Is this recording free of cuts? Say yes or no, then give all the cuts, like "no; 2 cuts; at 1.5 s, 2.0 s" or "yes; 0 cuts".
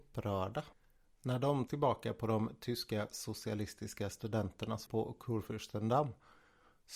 no; 2 cuts; at 1.7 s, 4.9 s